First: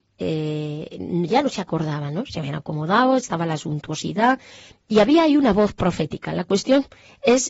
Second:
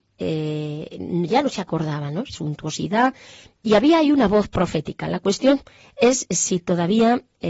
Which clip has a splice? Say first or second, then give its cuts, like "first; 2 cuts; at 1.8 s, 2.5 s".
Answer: second; 1 cut; at 2.3 s